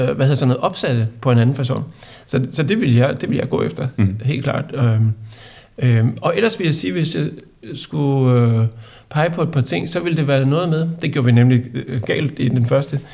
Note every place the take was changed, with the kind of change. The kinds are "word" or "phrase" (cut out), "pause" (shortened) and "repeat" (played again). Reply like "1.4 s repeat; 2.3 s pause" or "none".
none